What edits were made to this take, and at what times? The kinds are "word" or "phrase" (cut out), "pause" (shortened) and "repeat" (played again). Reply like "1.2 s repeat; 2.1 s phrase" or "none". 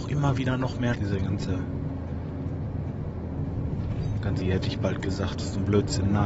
0.9 s word; 4.4 s word